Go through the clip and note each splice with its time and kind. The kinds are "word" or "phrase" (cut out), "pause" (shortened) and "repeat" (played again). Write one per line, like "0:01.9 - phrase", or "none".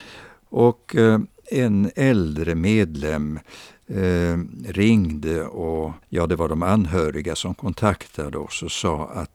0:06.0 - pause